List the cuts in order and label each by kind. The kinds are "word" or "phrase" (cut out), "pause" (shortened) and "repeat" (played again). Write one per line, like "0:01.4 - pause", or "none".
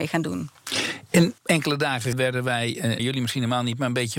0:01.4 - word
0:02.1 - word
0:03.0 - word